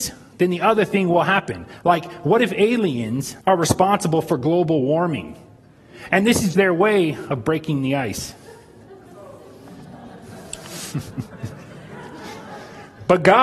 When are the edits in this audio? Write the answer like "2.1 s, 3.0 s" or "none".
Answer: 3.4 s, 6.5 s